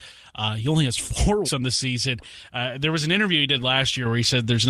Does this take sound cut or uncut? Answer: cut